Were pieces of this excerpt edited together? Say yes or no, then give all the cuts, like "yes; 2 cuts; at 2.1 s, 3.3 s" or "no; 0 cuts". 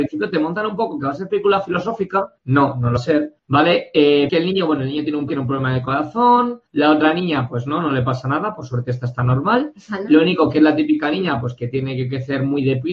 yes; 6 cuts; at 2.4 s, 3.0 s, 3.4 s, 4.3 s, 5.3 s, 6.7 s